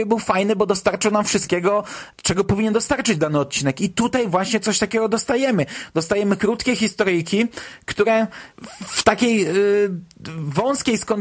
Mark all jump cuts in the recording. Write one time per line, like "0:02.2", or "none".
none